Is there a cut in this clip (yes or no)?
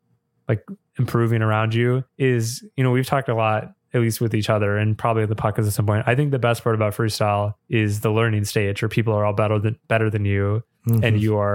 yes